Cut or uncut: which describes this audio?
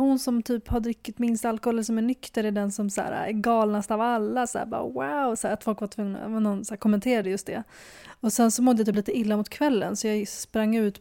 uncut